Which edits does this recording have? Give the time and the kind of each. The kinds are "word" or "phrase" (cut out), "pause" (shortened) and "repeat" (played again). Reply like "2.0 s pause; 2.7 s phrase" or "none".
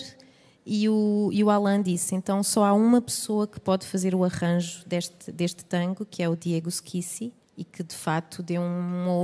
7.4 s pause